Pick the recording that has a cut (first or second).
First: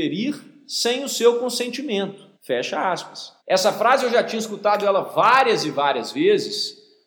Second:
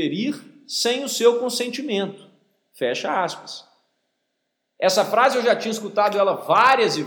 first